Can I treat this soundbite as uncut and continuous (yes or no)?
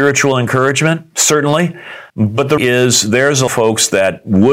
no